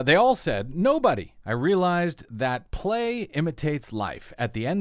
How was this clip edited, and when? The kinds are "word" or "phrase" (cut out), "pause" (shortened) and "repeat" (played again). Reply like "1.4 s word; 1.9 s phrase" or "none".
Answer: 1.4 s pause